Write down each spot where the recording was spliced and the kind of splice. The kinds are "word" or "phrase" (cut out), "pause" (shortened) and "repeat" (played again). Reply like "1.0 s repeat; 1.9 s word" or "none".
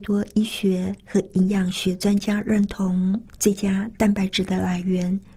3.3 s pause